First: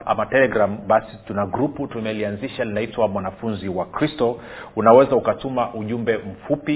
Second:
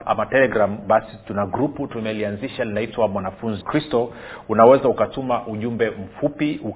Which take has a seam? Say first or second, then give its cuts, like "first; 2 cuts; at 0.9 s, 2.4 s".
second; 1 cut; at 3.6 s